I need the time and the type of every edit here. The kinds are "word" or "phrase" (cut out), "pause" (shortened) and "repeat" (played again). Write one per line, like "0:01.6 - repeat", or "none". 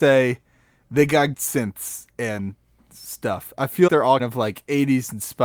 0:01.3 - word
0:03.9 - word
0:04.2 - word